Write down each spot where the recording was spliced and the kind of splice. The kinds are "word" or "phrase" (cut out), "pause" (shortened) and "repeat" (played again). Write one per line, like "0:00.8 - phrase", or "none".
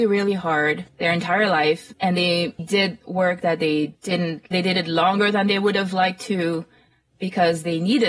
0:02.6 - word
0:04.5 - phrase